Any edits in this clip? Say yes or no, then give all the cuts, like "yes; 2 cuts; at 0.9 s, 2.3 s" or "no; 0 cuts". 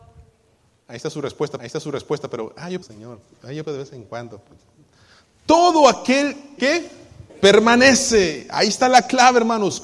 yes; 5 cuts; at 1.6 s, 2.8 s, 3.6 s, 6.6 s, 7.3 s